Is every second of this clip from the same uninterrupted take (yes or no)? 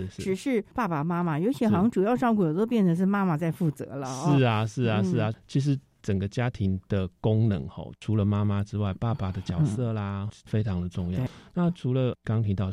yes